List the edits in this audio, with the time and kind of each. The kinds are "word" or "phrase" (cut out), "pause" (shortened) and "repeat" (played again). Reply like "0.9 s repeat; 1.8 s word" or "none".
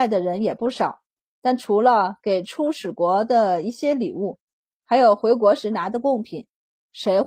none

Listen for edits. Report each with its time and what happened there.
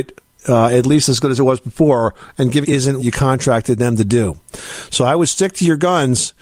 2.6 s phrase; 3.0 s word

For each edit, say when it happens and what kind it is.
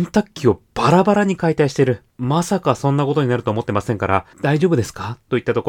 2.1 s pause; 4.3 s pause

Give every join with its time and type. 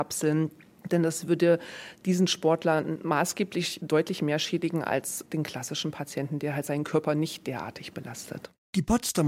none

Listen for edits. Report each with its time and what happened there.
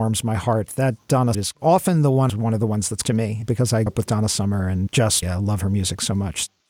1.3 s phrase; 2.3 s phrase; 3.0 s word; 3.9 s word; 5.2 s word

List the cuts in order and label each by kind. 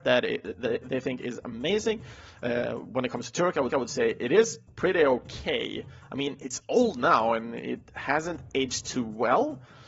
3.7 s repeat

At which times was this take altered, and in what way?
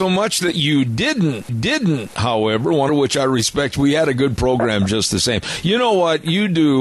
1.5 s repeat; 2.9 s phrase

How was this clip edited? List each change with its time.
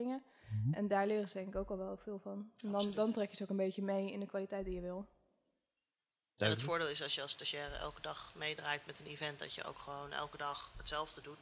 none

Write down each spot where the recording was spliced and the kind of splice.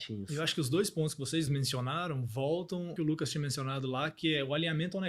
1.5 s word; 3.0 s phrase

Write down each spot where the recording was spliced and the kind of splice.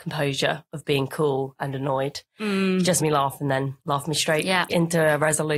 3.0 s word; 3.8 s pause; 4.7 s word

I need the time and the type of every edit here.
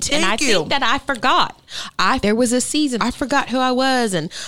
2.2 s word; 3.0 s word

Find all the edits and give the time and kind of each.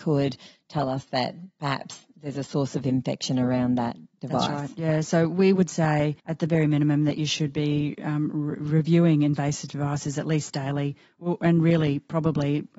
6.2 s pause

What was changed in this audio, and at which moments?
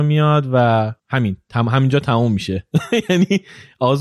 1.0 s pause

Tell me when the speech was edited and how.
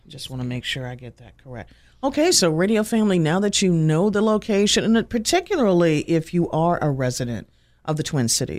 none

